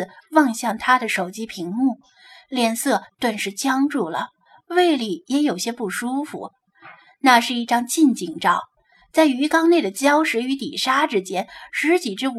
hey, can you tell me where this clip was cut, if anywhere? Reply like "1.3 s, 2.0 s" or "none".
none